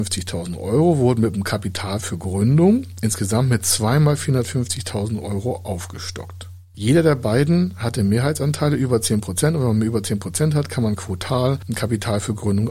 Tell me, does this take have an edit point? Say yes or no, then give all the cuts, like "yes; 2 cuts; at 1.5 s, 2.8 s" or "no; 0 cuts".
no; 0 cuts